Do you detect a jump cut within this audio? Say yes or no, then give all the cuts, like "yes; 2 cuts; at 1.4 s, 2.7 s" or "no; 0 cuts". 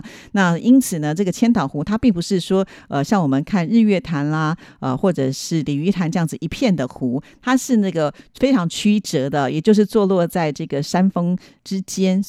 no; 0 cuts